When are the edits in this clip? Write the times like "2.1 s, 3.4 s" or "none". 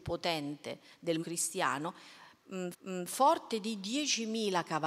1.2 s, 2.7 s